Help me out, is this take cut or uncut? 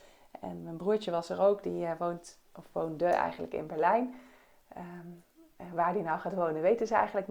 uncut